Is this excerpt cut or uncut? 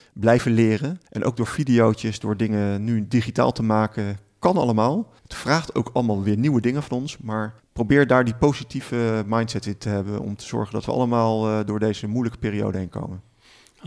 cut